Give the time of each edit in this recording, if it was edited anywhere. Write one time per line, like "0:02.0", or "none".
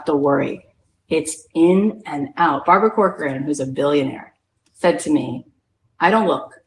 none